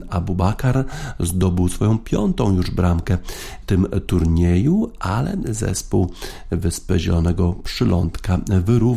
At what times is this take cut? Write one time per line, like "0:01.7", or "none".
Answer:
0:03.6